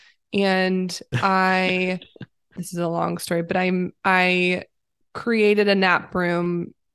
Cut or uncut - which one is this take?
cut